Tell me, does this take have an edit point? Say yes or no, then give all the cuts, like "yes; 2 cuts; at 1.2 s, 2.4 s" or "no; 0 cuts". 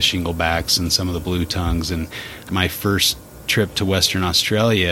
yes; 1 cut; at 2.5 s